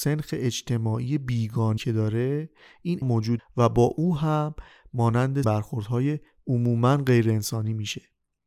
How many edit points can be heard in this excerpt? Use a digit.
4